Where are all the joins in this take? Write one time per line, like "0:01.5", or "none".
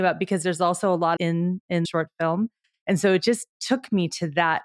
0:01.2
0:01.8